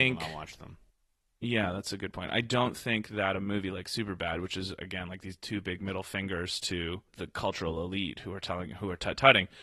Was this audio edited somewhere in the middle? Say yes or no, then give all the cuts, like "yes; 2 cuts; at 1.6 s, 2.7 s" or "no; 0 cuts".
no; 0 cuts